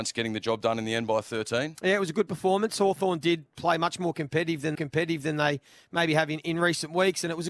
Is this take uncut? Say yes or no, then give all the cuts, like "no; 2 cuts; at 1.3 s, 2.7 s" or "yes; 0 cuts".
no; 1 cut; at 4.7 s